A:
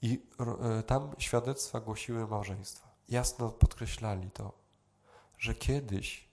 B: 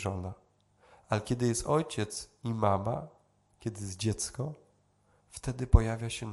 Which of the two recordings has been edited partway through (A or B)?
A